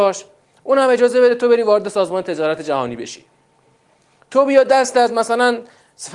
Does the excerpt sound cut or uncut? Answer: uncut